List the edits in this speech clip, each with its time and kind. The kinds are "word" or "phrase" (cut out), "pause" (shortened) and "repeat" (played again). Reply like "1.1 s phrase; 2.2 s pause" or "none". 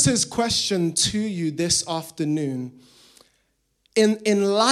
none